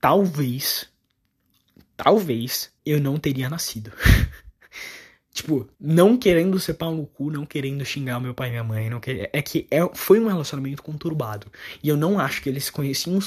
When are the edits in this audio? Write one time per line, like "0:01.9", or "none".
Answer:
0:02.8
0:05.7